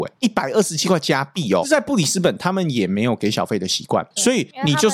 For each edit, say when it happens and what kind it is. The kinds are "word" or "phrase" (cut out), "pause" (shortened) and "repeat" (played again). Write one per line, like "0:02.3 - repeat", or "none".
0:01.6 - phrase